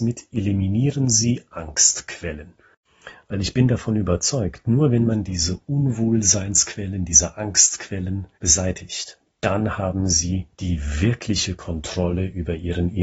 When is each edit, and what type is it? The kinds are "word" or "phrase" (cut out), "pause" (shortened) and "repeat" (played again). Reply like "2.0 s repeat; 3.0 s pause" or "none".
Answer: 8.3 s pause; 10.5 s pause